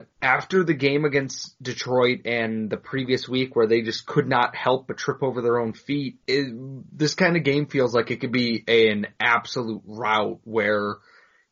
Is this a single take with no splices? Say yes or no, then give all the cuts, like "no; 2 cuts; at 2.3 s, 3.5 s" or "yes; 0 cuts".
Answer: no; 1 cut; at 6.2 s